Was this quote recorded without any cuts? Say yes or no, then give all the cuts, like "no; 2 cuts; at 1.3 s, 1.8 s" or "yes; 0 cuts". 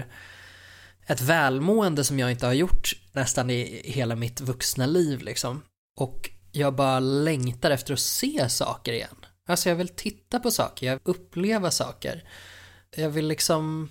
no; 2 cuts; at 3.1 s, 11.0 s